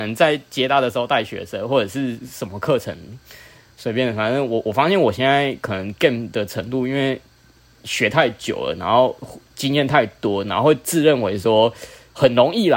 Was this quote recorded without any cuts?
yes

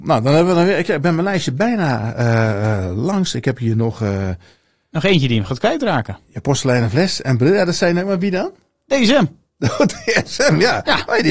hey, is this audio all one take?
yes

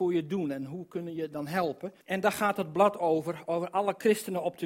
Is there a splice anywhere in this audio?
yes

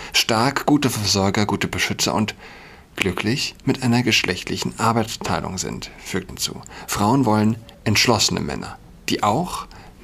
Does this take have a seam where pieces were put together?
yes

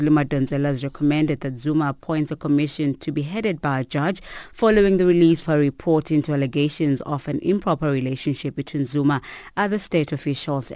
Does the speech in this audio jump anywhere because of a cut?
yes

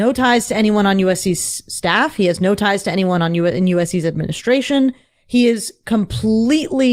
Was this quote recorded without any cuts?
yes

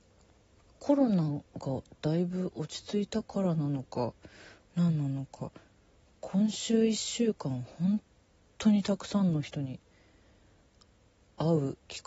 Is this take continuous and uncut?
yes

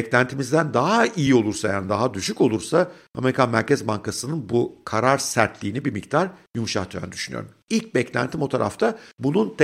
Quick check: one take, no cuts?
yes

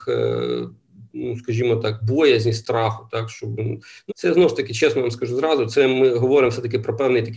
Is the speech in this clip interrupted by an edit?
yes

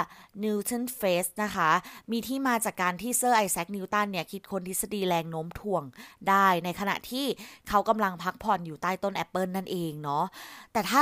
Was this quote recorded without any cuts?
yes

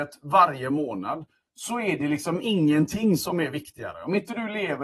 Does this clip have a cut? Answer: no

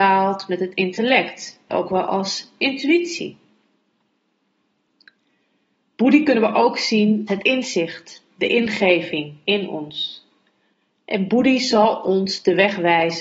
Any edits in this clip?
yes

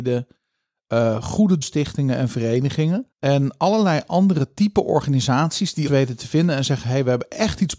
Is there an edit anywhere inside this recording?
yes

